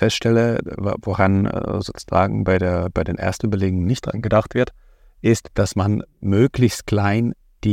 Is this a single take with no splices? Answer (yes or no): yes